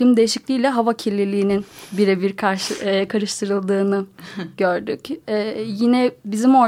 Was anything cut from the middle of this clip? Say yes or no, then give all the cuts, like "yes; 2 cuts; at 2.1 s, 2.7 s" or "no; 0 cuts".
no; 0 cuts